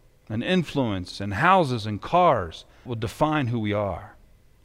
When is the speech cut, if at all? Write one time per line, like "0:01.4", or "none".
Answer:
0:02.9